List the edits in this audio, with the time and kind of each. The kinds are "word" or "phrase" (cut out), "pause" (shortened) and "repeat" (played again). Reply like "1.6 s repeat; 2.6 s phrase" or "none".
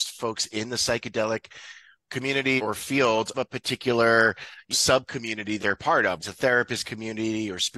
2.6 s word; 3.3 s word; 4.7 s word; 5.6 s word; 6.2 s word

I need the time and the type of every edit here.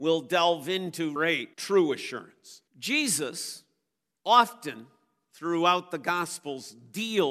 1.2 s phrase; 1.5 s pause; 2.7 s pause

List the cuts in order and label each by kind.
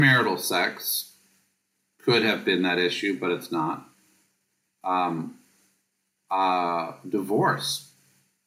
none

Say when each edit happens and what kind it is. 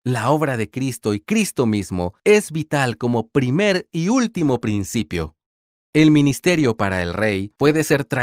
none

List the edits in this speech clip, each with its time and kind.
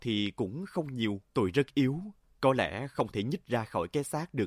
1.3 s pause; 2.2 s pause

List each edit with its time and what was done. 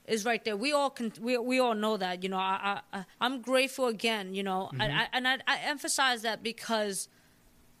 3.1 s pause

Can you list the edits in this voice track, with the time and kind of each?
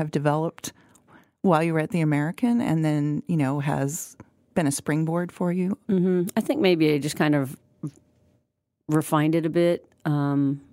none

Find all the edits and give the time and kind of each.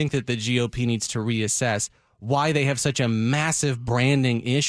none

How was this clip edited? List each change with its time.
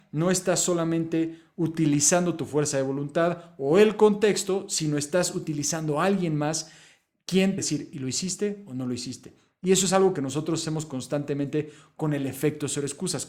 7.6 s word

